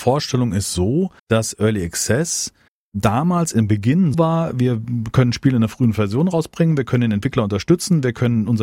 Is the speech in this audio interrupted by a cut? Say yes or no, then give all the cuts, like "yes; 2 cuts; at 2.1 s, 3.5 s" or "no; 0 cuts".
yes; 3 cuts; at 1.2 s, 2.7 s, 4.1 s